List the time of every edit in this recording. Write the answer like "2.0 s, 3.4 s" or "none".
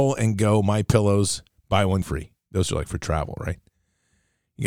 2.0 s